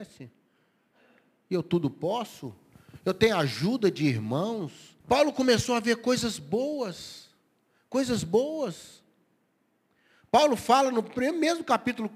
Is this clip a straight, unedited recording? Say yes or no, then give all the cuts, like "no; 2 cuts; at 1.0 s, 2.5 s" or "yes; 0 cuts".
no; 1 cut; at 5.0 s